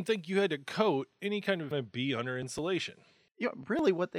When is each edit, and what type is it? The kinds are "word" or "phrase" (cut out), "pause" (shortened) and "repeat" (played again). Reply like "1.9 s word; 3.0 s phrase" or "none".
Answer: 1.7 s phrase